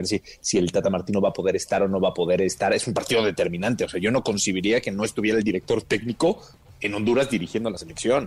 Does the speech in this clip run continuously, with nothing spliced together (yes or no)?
yes